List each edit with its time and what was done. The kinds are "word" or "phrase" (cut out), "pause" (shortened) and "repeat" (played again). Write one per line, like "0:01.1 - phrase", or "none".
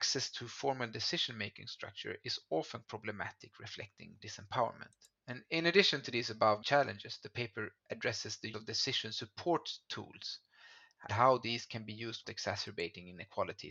0:02.8 - word
0:04.2 - word
0:05.1 - pause
0:06.6 - word
0:07.8 - pause
0:08.5 - word
0:11.1 - word
0:12.2 - word